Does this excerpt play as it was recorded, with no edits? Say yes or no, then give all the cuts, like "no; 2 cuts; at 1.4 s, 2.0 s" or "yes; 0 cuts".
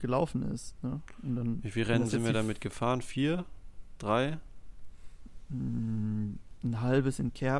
yes; 0 cuts